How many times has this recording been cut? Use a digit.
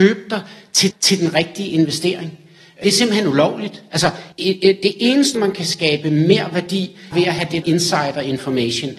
6